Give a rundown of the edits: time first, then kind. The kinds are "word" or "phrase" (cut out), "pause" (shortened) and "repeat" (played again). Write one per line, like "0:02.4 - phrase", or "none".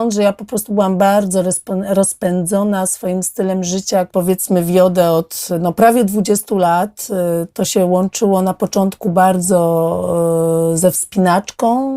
0:04.1 - word